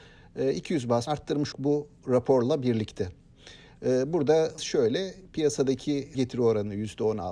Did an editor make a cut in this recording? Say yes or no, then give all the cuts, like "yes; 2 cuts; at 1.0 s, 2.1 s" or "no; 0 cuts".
yes; 4 cuts; at 1.1 s, 1.5 s, 4.6 s, 6.1 s